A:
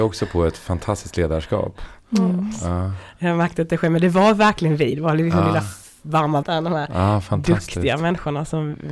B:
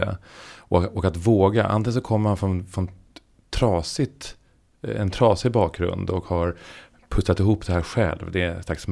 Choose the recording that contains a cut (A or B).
A